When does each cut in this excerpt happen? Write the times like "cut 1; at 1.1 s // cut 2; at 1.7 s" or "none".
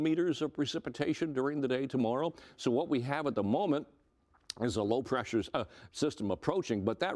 none